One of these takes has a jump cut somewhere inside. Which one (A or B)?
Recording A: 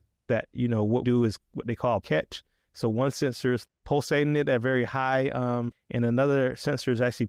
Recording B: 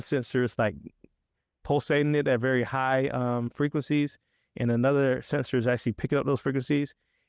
A